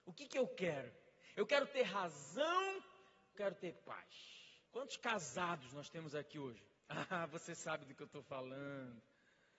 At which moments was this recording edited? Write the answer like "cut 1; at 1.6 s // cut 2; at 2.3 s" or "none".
cut 1; at 3.3 s // cut 2; at 4.6 s // cut 3; at 6.8 s